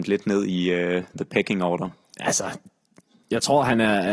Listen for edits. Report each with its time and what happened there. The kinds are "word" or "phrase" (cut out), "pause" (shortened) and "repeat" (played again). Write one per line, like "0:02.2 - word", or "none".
none